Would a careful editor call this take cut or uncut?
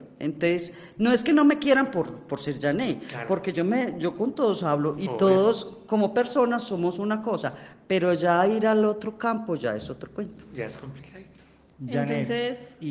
uncut